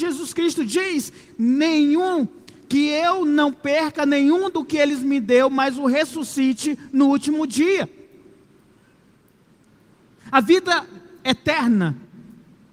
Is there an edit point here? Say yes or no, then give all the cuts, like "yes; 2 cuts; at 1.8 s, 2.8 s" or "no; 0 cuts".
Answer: no; 0 cuts